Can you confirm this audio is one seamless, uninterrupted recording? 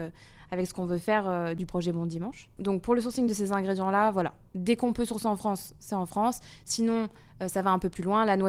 yes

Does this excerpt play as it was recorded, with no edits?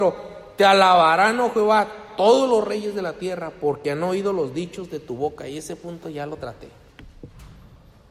yes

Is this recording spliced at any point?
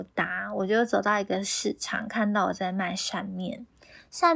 no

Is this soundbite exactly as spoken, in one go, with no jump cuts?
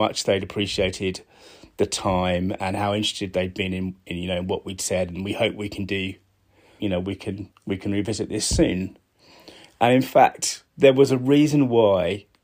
no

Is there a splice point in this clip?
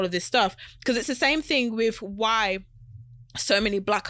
no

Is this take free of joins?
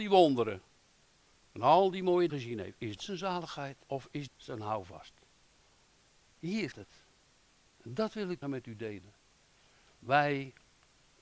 no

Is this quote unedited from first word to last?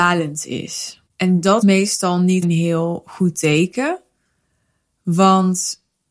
no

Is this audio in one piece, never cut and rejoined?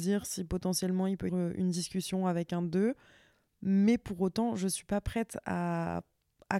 no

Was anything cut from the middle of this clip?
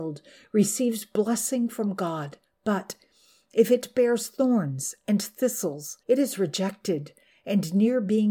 yes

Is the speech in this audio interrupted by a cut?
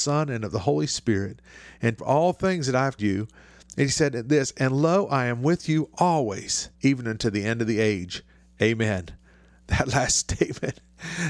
yes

